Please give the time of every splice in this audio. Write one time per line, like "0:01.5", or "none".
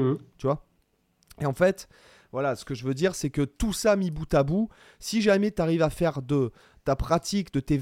none